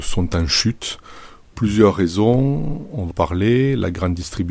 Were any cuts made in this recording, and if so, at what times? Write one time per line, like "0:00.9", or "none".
0:01.5
0:03.1